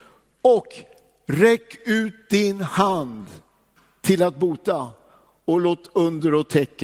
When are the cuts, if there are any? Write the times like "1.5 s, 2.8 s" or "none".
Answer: none